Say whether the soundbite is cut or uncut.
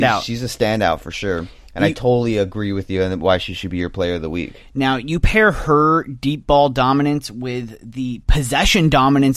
uncut